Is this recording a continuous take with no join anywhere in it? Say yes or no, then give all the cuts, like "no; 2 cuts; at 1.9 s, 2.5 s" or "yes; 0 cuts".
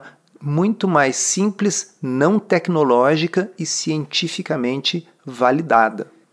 yes; 0 cuts